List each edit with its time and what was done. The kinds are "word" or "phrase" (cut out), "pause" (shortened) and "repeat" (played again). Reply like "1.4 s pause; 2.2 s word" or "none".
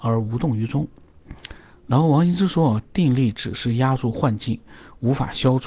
none